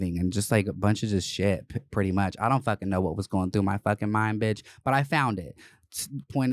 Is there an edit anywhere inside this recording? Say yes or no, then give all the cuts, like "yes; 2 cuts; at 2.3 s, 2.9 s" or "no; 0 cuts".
no; 0 cuts